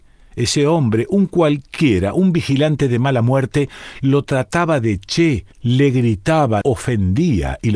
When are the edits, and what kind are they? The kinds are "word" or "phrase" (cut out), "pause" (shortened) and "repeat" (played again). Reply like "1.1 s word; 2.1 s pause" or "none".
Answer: 5.5 s pause; 6.6 s word